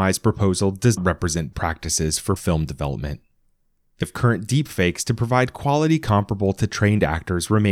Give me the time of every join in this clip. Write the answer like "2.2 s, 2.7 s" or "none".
1.0 s, 1.5 s, 2.4 s, 4.0 s